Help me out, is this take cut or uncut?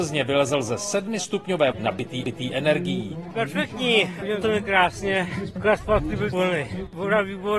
cut